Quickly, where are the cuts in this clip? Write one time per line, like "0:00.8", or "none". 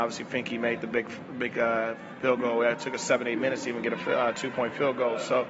none